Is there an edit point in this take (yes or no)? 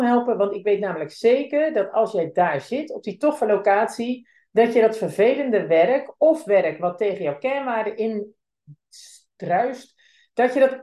no